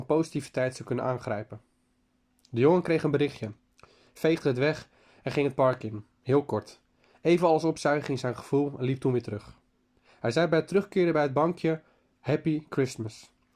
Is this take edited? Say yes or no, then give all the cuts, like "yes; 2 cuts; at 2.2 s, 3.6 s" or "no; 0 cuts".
no; 0 cuts